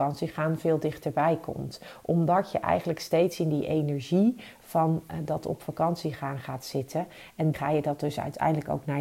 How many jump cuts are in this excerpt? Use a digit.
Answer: 1